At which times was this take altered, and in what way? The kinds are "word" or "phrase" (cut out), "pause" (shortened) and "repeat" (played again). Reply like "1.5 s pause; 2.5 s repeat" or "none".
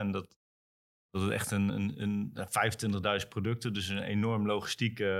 1.7 s word